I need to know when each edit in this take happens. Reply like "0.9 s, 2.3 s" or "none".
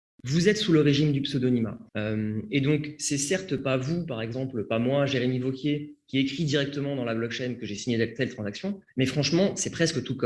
1.9 s, 8.9 s